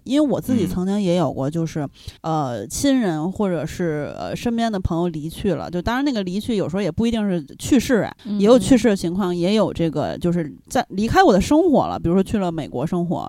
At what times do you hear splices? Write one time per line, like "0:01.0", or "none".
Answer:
0:02.2
0:08.2